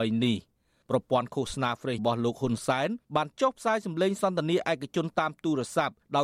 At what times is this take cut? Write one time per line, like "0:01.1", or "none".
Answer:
0:02.0